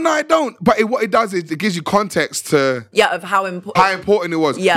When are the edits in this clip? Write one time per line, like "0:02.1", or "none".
0:03.8

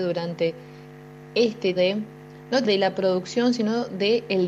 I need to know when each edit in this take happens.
0:01.8
0:02.6

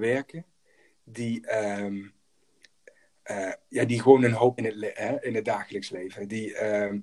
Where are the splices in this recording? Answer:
0:04.6

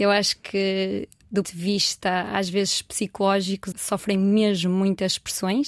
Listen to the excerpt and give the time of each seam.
0:01.4
0:03.7

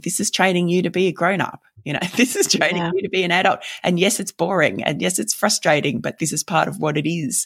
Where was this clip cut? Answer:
none

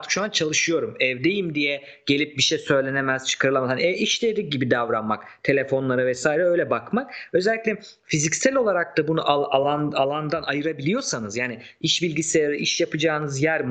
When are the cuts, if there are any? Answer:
none

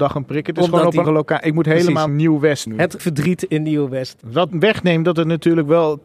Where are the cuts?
0:01.0
0:02.1
0:02.7
0:03.0
0:04.5

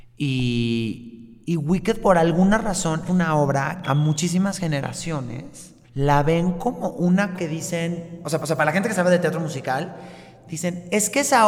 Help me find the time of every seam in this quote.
0:03.1
0:03.8
0:05.8
0:07.4
0:08.4

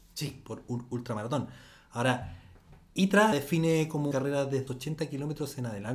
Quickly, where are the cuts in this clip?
0:03.3
0:04.1
0:04.7

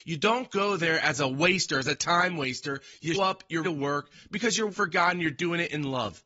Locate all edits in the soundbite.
0:03.1
0:03.6
0:04.7

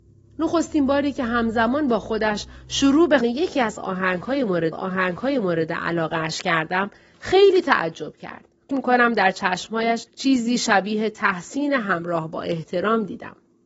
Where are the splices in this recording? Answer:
0:03.2
0:04.7
0:08.7
0:10.1

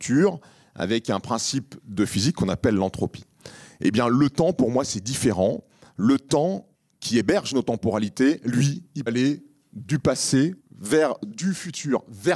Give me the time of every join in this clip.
0:06.7
0:09.1
0:10.6

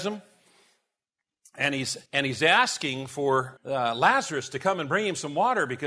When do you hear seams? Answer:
0:02.1
0:03.6

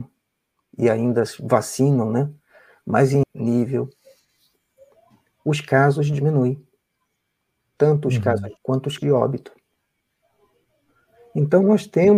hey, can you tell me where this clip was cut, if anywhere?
0:03.2
0:08.6
0:09.0

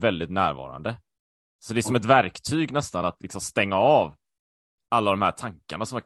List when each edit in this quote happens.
none

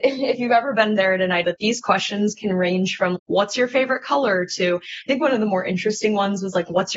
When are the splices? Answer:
0:01.4
0:03.1

